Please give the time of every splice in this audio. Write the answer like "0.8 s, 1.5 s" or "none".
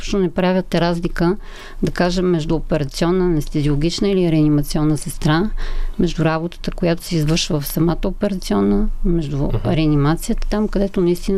none